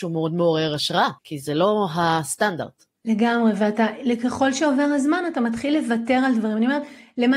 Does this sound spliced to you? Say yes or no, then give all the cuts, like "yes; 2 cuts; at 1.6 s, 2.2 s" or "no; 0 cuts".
no; 0 cuts